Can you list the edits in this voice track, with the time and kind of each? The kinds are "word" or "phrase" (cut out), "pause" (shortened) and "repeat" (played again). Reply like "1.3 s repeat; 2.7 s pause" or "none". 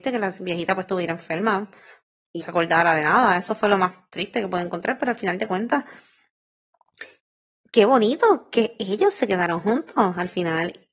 2.4 s word